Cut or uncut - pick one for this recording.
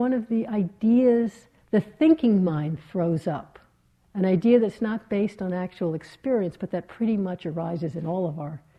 uncut